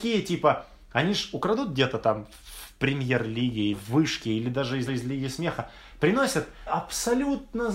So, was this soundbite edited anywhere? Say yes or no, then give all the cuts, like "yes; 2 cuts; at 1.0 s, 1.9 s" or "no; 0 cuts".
yes; 3 cuts; at 3.7 s, 4.9 s, 6.7 s